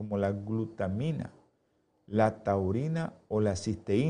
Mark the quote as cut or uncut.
uncut